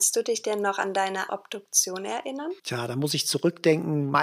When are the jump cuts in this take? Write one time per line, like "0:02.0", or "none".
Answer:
0:01.3
0:02.6